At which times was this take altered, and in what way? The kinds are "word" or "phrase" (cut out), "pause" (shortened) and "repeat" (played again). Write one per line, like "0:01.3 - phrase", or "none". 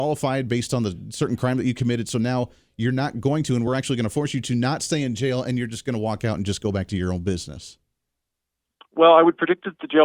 none